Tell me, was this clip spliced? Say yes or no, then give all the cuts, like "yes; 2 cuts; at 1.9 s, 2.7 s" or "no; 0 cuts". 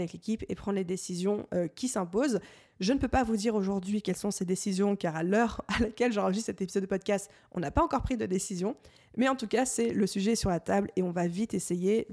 no; 0 cuts